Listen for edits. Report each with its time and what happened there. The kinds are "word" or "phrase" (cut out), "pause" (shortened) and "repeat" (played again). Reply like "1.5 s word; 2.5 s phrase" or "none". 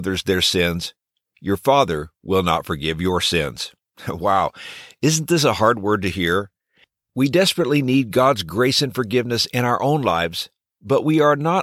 none